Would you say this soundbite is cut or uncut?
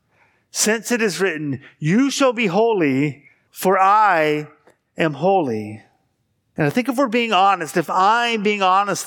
uncut